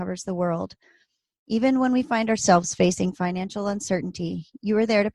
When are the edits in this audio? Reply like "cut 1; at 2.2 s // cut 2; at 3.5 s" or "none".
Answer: none